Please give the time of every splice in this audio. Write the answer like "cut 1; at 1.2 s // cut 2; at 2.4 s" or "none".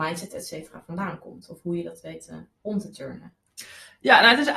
none